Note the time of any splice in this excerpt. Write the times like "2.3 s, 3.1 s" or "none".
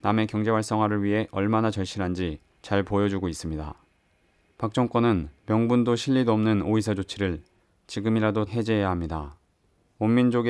5.4 s, 8.5 s